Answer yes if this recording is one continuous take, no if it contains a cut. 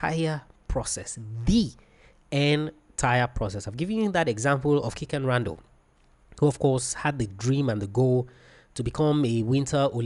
yes